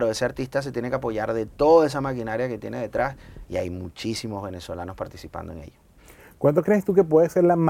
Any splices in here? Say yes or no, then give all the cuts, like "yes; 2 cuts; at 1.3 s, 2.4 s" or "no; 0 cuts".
no; 0 cuts